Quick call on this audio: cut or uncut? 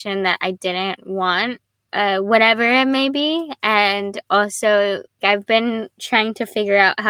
uncut